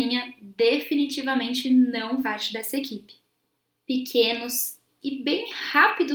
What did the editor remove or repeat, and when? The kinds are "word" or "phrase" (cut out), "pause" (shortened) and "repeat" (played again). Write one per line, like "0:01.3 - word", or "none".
0:02.2 - word
0:05.0 - word